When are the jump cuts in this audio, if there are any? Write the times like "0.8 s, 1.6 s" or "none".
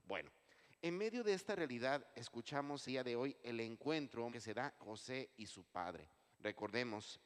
2.9 s, 4.3 s, 4.8 s, 6.3 s